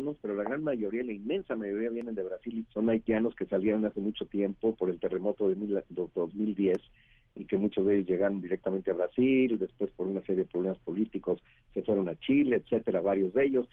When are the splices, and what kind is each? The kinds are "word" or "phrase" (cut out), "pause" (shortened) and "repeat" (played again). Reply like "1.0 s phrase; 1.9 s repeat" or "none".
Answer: 2.7 s word